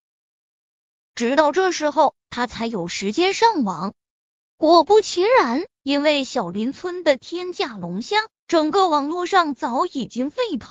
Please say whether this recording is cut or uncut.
cut